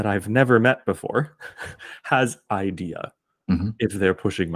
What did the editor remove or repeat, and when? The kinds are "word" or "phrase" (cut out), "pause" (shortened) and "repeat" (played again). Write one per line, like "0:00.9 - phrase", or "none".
0:02.5 - phrase